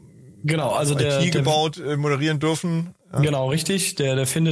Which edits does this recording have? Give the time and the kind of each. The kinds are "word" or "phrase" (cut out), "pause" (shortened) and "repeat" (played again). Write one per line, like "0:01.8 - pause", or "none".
none